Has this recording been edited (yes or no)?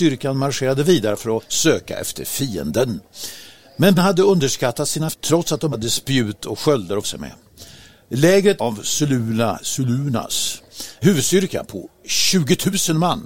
yes